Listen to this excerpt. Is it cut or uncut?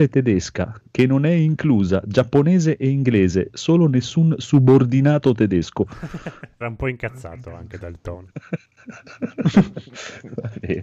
cut